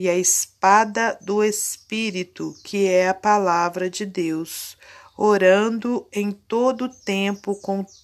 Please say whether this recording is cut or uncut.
uncut